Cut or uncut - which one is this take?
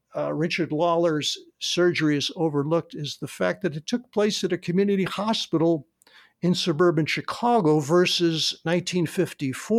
uncut